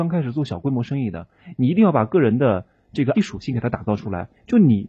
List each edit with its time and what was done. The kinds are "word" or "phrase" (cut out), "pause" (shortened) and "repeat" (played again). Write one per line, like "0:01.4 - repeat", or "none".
0:03.1 - word